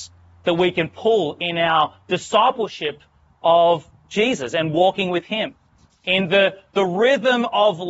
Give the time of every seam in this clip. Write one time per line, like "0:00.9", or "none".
none